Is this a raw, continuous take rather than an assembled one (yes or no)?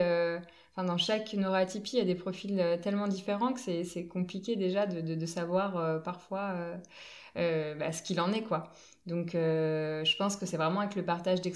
yes